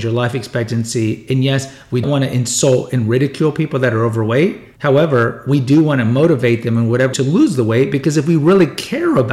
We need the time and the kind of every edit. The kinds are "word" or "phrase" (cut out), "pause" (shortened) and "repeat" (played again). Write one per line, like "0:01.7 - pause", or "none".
0:02.0 - word
0:04.7 - pause
0:07.1 - phrase